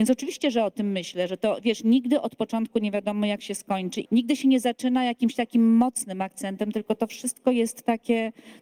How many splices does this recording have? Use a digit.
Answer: 1